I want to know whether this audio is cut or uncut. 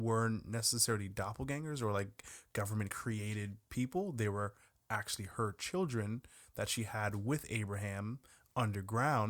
uncut